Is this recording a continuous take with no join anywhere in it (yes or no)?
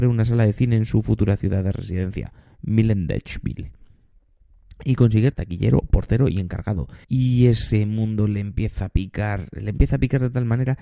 no